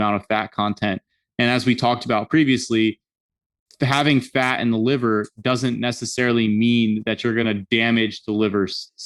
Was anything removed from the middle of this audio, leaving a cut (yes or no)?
no